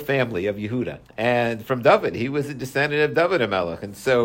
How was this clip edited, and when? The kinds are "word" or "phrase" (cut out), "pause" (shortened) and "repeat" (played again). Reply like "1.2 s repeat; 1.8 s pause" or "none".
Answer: 1.0 s pause

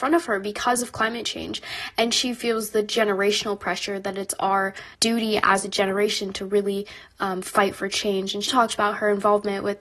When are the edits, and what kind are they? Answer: 4.9 s pause; 8.5 s word

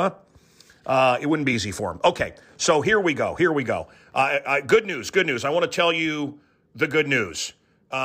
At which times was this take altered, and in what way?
none

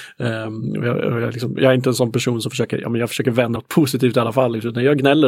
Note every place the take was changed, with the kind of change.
3.6 s phrase

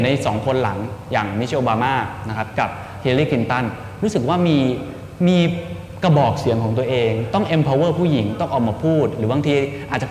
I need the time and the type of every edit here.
none

